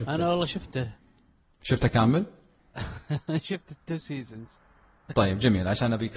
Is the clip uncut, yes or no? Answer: yes